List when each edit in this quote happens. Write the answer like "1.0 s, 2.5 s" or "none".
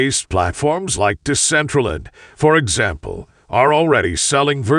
none